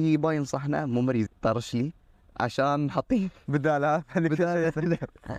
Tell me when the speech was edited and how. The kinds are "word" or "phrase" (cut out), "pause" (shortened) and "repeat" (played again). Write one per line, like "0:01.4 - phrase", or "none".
0:01.3 - word

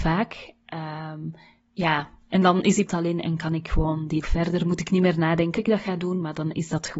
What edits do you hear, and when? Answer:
0:01.6 - pause
0:02.9 - phrase
0:04.2 - word
0:05.6 - word

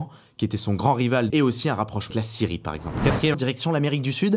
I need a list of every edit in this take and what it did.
0:01.3 - phrase
0:02.1 - word
0:03.3 - phrase

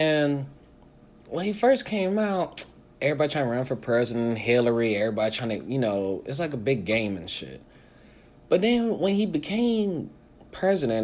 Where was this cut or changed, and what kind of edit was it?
none

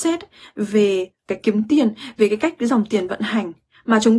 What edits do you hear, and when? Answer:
0:01.4 - word

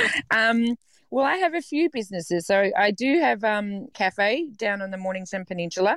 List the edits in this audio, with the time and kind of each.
0:03.9 - word

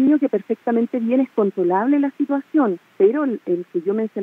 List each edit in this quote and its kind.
0:02.8 - pause

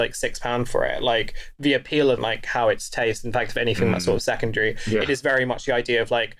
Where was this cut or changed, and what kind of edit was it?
0:02.2 - phrase

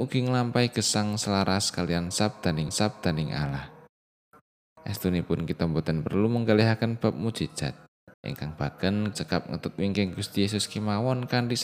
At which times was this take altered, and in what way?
0:02.7 - repeat
0:08.1 - pause
0:09.1 - word

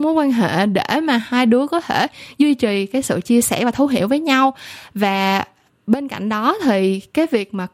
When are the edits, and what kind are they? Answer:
none

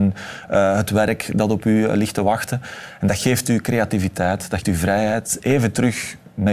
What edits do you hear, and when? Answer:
0:04.6 - word

